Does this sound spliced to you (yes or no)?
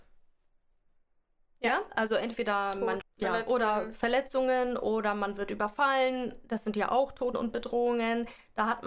yes